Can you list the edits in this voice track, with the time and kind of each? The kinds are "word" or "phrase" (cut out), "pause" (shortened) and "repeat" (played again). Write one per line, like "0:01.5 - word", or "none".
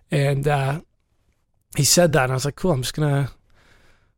none